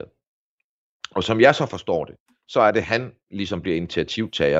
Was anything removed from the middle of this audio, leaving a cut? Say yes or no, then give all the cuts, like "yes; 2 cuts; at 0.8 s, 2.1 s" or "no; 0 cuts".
no; 0 cuts